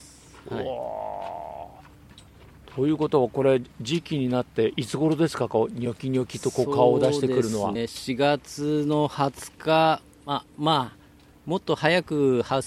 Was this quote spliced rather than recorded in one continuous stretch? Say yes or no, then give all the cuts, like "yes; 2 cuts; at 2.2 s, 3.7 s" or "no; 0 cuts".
yes; 1 cut; at 7.7 s